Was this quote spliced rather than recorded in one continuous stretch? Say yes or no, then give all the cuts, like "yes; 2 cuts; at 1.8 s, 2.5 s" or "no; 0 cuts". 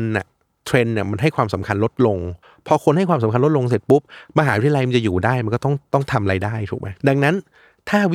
yes; 2 cuts; at 2.4 s, 7.0 s